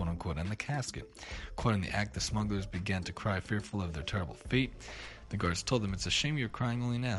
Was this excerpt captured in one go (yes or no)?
yes